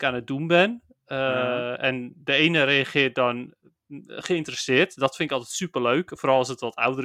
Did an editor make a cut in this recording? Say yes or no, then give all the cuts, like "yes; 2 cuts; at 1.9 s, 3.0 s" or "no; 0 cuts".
no; 0 cuts